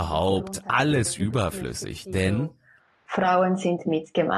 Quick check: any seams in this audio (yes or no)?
no